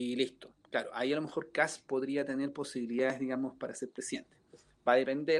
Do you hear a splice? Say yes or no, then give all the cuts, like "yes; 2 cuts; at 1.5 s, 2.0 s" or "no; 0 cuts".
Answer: no; 0 cuts